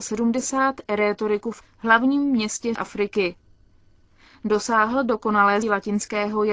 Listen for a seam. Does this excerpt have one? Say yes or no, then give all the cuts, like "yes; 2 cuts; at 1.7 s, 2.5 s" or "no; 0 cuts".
yes; 3 cuts; at 1.6 s, 2.8 s, 5.6 s